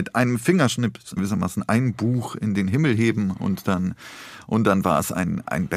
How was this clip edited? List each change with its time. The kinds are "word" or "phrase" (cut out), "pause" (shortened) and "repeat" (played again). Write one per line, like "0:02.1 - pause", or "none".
0:01.2 - word

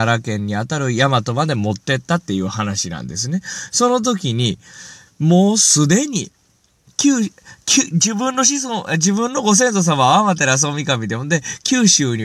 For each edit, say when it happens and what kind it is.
none

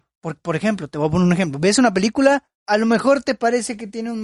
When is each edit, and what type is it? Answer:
0:02.6 - pause

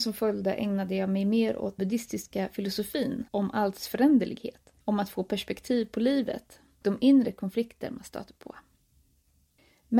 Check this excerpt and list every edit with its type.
0:01.8 - word
0:03.3 - pause
0:04.8 - pause
0:06.8 - word

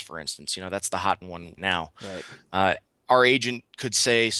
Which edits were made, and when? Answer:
0:01.2 - word
0:01.6 - word
0:02.9 - pause

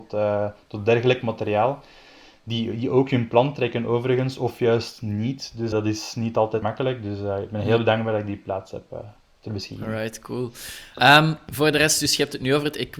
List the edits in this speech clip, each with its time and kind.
0:05.7 - word
0:06.6 - word

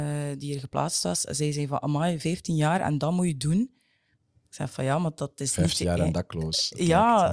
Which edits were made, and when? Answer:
none

